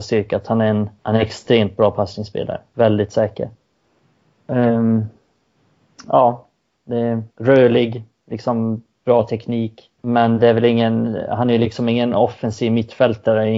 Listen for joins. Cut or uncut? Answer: cut